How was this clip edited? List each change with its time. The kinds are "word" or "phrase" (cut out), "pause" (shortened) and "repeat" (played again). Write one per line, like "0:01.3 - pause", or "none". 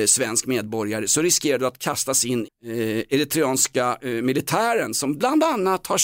0:02.5 - word